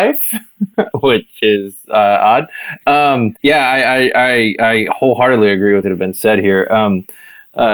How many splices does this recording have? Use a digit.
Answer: 3